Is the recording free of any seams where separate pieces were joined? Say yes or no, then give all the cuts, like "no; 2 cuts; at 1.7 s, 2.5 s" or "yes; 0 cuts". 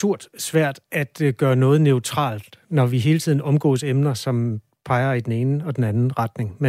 yes; 0 cuts